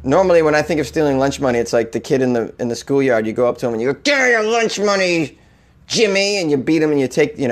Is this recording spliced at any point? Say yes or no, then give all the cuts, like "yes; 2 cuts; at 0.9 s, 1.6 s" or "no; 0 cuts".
no; 0 cuts